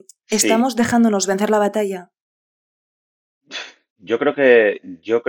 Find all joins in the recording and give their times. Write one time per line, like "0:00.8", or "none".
none